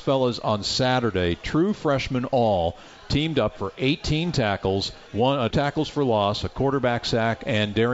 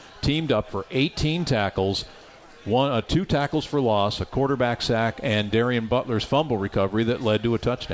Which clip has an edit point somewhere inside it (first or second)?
first